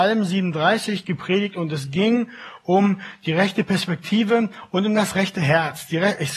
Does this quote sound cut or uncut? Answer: uncut